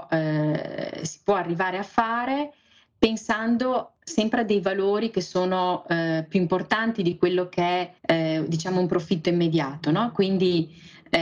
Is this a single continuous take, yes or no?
no